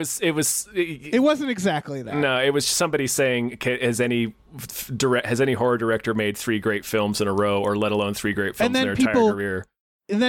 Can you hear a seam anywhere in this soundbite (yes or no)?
no